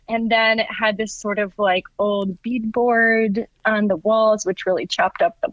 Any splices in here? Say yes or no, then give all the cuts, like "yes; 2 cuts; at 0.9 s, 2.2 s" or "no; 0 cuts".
no; 0 cuts